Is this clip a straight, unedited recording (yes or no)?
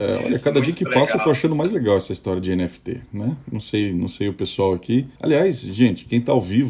no